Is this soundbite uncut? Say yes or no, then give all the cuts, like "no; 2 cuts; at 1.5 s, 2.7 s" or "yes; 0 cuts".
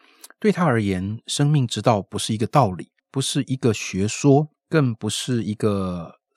no; 2 cuts; at 3.0 s, 4.5 s